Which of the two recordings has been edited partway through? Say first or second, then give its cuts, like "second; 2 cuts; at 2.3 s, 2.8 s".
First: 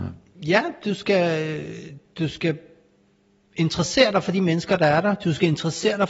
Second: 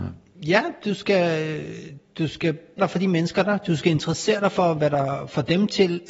second; 2 cuts; at 2.8 s, 3.4 s